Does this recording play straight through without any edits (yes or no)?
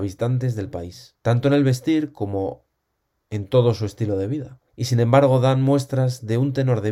no